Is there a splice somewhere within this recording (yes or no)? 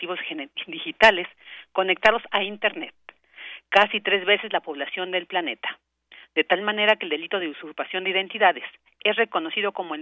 no